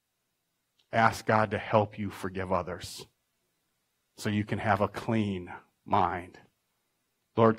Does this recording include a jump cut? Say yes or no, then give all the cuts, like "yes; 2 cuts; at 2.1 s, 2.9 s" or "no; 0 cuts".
no; 0 cuts